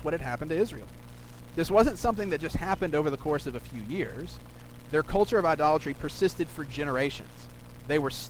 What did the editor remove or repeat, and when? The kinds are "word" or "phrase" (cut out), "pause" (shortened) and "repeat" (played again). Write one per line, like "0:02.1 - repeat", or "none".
none